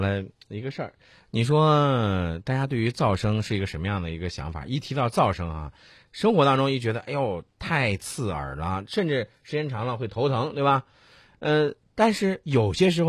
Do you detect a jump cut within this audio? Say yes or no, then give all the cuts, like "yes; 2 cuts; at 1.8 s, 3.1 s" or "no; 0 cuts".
no; 0 cuts